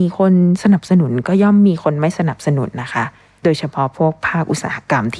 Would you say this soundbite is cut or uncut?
uncut